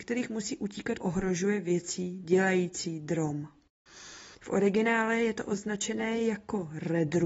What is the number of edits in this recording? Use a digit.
2